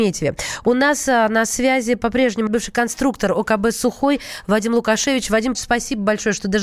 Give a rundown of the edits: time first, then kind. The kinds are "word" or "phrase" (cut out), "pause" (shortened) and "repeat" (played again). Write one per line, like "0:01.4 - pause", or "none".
0:02.5 - word
0:05.5 - word

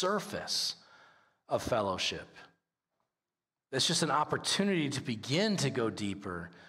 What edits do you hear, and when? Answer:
none

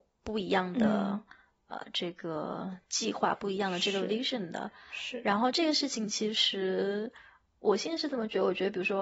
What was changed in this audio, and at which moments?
none

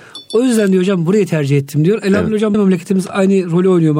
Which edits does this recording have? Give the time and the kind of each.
0:02.5 - word

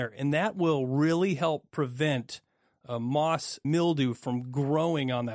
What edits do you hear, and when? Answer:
0:03.6 - word

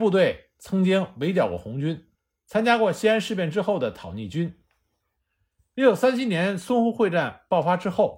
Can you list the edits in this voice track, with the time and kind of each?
none

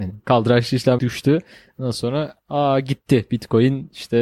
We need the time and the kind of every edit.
0:01.0 - word

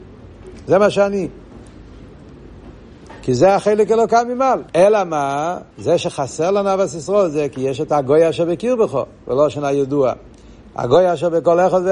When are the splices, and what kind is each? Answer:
0:04.7 - pause
0:05.7 - pause

